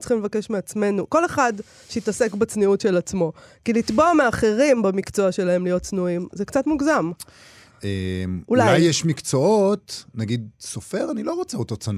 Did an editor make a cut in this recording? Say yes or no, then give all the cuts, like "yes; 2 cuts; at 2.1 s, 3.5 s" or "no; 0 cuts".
no; 0 cuts